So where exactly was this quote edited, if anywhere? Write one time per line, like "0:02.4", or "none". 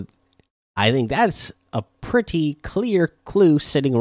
none